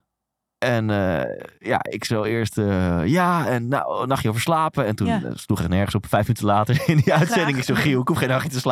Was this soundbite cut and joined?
no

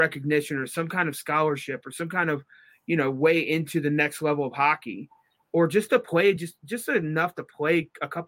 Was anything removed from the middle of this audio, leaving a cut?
no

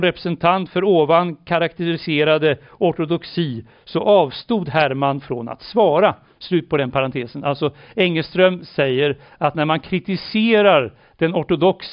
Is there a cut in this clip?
no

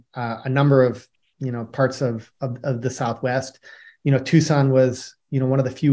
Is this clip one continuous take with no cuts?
yes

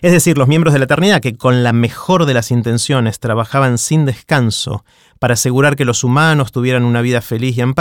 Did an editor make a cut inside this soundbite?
no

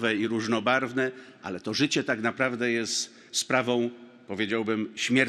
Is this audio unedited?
yes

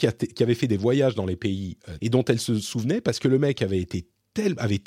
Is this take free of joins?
no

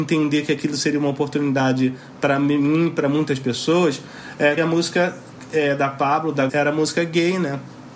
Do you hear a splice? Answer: yes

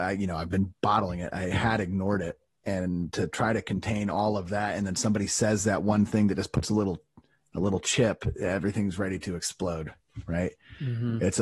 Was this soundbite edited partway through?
no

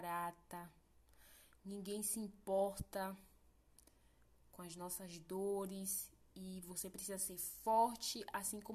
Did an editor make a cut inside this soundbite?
no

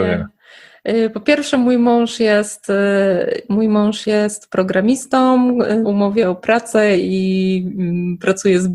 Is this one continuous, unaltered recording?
no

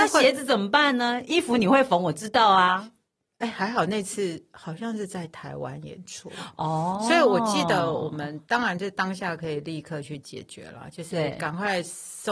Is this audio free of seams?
yes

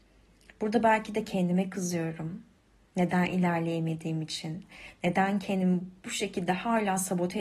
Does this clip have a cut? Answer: no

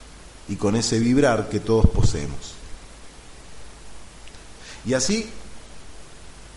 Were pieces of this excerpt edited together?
no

